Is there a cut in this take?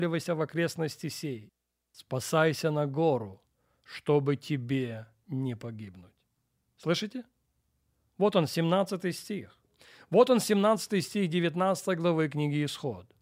no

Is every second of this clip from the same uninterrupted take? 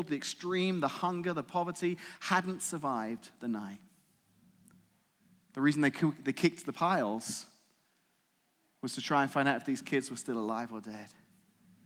yes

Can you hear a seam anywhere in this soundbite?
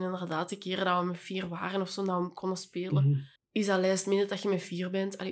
yes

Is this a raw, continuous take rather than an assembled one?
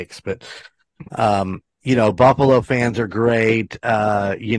yes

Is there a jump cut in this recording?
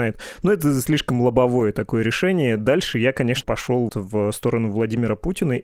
yes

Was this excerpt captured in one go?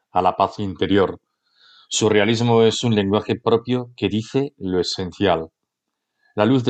yes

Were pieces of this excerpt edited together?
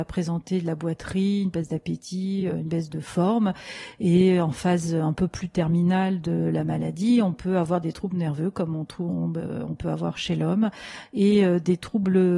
no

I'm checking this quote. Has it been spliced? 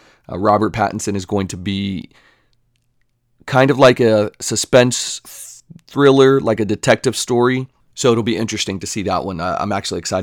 no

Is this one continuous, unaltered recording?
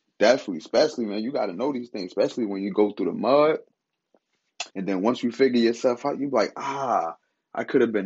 no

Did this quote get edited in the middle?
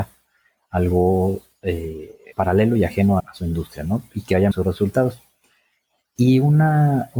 yes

